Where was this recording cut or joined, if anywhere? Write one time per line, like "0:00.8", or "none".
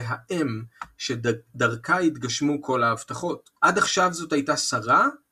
0:03.6